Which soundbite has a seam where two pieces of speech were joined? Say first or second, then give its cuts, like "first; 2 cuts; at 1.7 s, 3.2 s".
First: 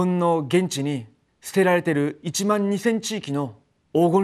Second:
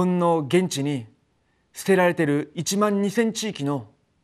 first; 1 cut; at 1.3 s